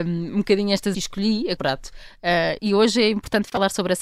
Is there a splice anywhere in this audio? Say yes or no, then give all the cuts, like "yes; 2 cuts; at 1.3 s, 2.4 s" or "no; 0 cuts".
yes; 3 cuts; at 0.9 s, 1.6 s, 2.6 s